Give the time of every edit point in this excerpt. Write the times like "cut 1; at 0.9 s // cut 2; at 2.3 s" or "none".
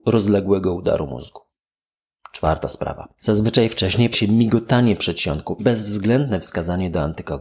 cut 1; at 3.2 s // cut 2; at 4.1 s // cut 3; at 5.6 s